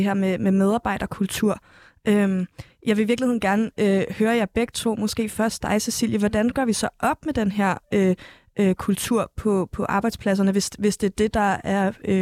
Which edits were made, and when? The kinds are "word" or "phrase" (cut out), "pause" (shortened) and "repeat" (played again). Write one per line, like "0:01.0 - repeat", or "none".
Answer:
none